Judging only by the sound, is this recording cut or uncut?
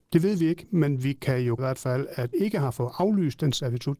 cut